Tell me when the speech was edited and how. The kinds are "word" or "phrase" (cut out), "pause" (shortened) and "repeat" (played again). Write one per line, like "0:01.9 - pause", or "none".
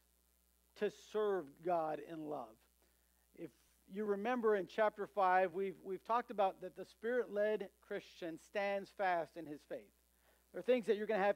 none